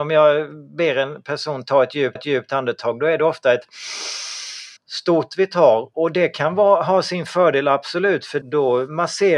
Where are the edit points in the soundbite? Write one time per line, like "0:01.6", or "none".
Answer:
0:02.2
0:04.8
0:05.9
0:08.4